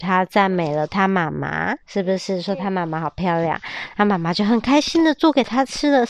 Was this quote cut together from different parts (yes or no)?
yes